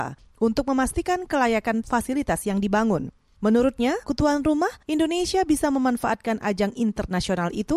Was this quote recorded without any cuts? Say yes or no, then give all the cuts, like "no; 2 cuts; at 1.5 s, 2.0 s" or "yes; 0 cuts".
no; 3 cuts; at 1.8 s, 4.0 s, 4.8 s